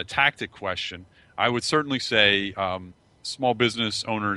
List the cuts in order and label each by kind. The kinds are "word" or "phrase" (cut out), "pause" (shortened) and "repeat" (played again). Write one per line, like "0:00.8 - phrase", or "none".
none